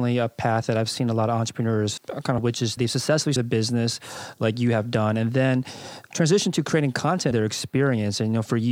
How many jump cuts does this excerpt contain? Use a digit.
6